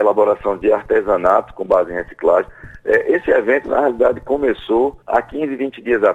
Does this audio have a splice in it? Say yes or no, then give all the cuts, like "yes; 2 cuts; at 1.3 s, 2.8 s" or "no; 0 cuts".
yes; 1 cut; at 5.0 s